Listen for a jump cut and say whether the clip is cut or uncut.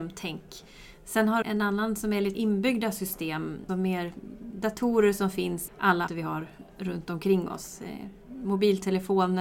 cut